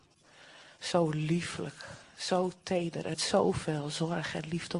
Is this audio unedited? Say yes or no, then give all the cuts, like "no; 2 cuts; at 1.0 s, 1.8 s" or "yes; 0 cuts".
no; 1 cut; at 3.1 s